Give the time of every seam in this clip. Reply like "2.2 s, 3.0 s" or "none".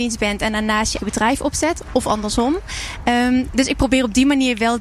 1.0 s